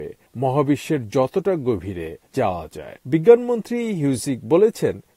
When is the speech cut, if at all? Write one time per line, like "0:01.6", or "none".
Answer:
0:03.0